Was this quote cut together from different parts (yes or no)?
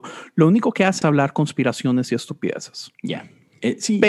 yes